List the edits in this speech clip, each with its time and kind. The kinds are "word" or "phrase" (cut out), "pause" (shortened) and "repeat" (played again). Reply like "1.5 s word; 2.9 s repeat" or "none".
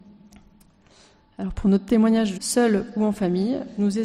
2.3 s phrase

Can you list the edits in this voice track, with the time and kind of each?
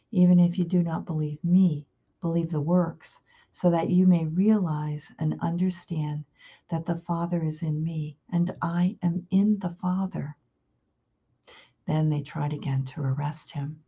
8.2 s pause

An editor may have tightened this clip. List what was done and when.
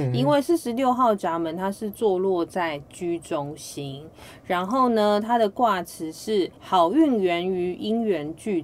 6.6 s pause

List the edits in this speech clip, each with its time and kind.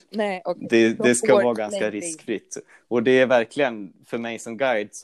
none

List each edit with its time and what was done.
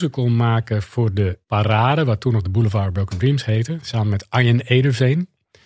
1.4 s pause

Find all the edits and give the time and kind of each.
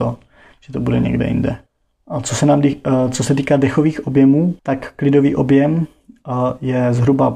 1.7 s pause; 4.6 s pause

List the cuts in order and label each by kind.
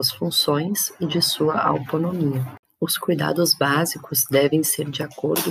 none

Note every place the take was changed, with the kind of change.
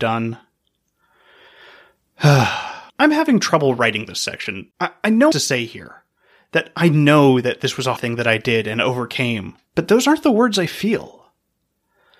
2.9 s pause; 4.7 s pause; 5.3 s phrase; 8.0 s word; 9.7 s pause

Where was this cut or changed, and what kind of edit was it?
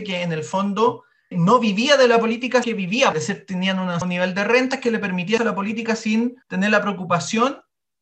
1.3 s word; 2.6 s word; 3.1 s phrase; 4.0 s word; 5.4 s word; 6.4 s pause

